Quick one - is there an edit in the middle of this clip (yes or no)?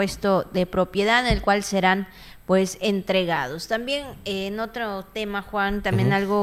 no